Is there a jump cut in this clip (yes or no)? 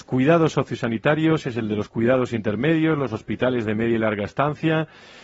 no